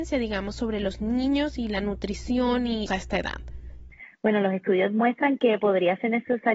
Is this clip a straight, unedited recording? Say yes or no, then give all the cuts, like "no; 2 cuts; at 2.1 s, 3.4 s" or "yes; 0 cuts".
no; 1 cut; at 2.9 s